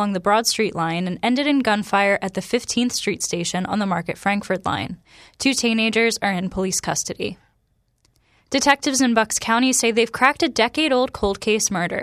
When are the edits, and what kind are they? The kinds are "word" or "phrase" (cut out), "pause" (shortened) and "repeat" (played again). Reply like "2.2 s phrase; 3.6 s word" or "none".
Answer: none

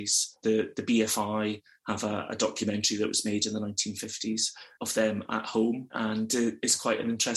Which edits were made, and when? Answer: none

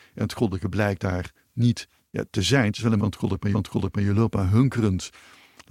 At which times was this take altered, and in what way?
2.0 s pause; 3.0 s word; 3.5 s repeat

